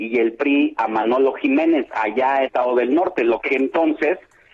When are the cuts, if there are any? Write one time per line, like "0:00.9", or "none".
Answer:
0:02.4
0:03.5

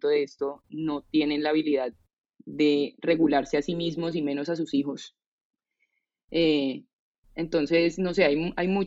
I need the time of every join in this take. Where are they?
none

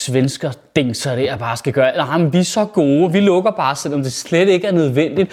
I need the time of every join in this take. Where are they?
none

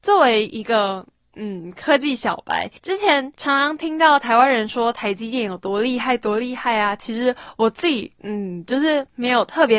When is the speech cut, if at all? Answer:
0:02.8

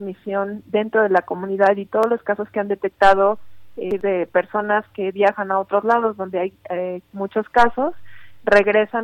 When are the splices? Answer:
none

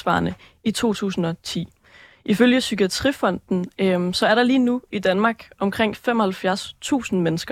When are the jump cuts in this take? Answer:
none

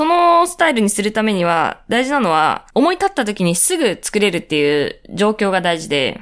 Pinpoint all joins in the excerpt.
0:02.7

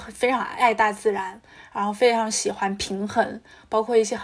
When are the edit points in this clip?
none

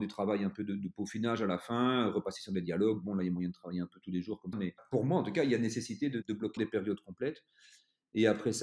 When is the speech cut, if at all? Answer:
0:04.5
0:06.6

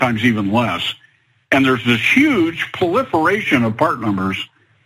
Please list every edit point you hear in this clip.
none

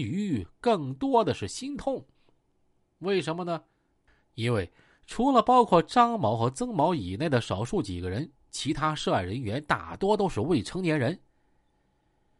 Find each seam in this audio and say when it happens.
none

